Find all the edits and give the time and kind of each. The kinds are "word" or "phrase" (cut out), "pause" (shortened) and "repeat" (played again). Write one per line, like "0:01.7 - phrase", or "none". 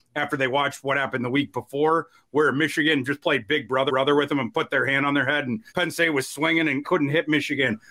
0:03.9 - repeat
0:04.5 - word
0:05.7 - pause
0:06.8 - phrase